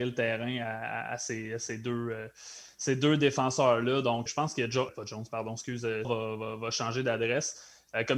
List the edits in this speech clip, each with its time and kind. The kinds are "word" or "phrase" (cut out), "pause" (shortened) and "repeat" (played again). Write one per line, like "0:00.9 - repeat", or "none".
0:04.3 - word
0:04.9 - word
0:06.0 - word

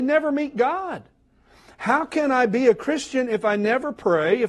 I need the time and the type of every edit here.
none

